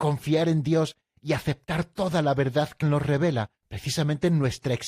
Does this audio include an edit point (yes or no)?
yes